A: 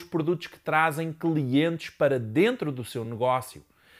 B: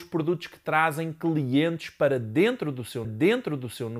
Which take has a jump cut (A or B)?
B